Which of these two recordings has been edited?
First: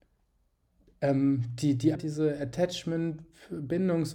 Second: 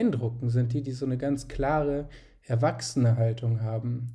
first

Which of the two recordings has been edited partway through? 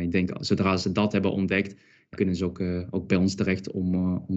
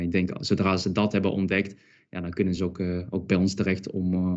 first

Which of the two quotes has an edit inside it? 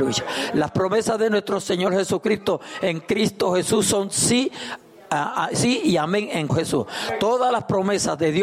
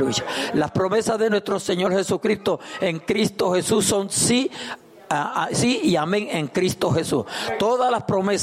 first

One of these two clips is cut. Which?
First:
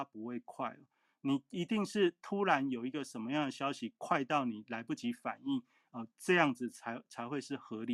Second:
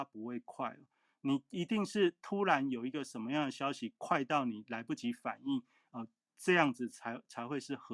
first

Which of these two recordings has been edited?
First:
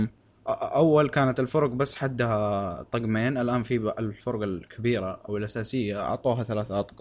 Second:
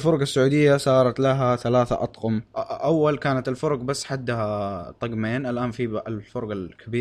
second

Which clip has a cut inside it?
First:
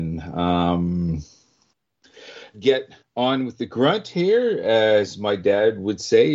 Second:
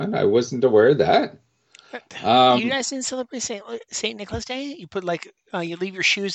first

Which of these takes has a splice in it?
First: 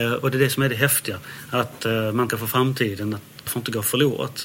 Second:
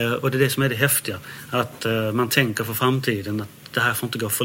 first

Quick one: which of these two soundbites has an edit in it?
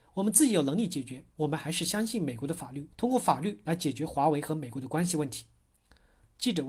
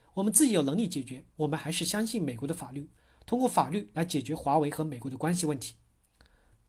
first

